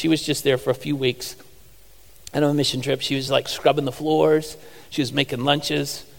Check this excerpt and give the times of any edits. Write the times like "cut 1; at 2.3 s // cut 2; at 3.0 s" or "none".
none